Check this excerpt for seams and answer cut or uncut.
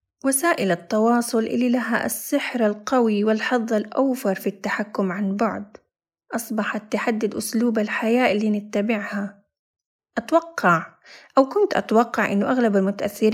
uncut